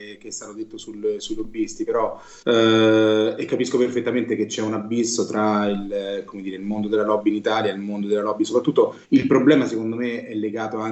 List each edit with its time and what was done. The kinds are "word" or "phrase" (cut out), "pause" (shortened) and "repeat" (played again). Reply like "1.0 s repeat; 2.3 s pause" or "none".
2.4 s pause; 9.0 s pause